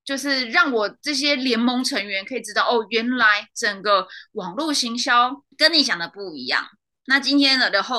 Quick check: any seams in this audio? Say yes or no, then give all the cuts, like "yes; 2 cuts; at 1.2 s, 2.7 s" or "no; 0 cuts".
yes; 1 cut; at 5.5 s